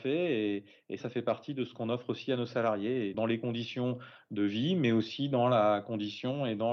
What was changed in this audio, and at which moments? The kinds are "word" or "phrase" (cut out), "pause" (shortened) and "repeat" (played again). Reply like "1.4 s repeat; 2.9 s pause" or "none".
1.0 s word; 3.1 s word